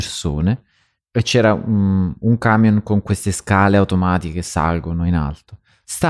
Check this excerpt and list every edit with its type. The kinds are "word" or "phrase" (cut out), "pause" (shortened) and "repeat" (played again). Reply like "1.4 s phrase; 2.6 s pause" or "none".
none